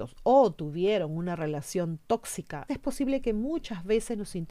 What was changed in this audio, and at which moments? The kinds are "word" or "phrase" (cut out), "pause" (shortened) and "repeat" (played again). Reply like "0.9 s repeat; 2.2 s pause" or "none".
2.7 s word